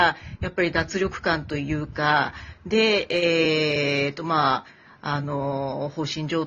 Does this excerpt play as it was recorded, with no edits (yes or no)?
yes